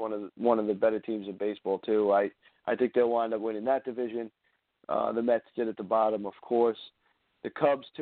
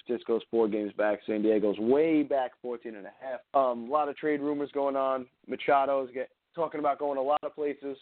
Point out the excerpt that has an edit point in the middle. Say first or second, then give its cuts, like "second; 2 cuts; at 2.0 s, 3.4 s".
second; 2 cuts; at 3.4 s, 6.4 s